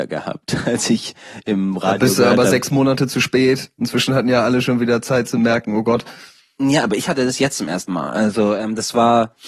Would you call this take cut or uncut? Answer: uncut